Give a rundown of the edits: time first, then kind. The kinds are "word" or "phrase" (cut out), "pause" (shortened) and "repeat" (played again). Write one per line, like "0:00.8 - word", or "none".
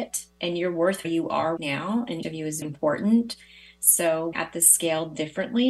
0:01.0 - word
0:01.6 - word
0:02.2 - word
0:02.6 - word
0:04.3 - word